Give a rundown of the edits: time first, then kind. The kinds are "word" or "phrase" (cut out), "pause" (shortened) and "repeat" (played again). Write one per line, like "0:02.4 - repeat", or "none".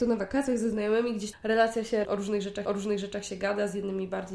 0:01.3 - word
0:02.0 - word
0:02.6 - repeat